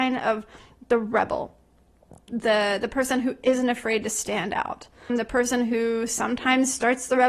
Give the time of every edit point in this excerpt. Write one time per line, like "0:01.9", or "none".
0:02.3
0:05.1